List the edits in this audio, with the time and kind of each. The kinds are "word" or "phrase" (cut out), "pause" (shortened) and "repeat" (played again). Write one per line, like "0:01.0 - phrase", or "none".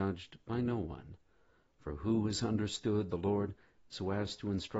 0:03.1 - phrase